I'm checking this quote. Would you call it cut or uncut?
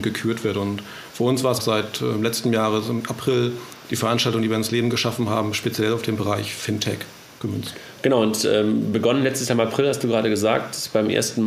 cut